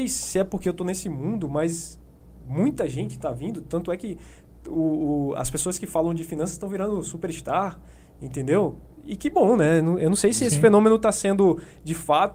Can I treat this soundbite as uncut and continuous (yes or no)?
yes